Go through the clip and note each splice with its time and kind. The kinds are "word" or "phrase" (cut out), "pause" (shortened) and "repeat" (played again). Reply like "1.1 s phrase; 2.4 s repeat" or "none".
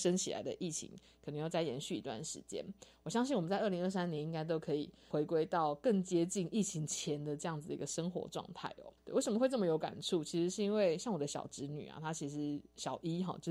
9.0 s pause